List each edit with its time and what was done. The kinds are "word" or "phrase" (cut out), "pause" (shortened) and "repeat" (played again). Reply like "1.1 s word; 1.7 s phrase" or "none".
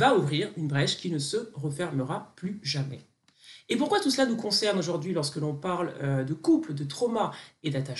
none